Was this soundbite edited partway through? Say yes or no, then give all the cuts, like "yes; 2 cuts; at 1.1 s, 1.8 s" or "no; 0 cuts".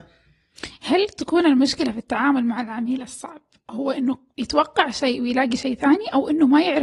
no; 0 cuts